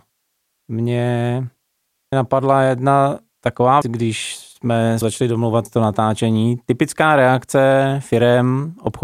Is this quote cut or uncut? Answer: cut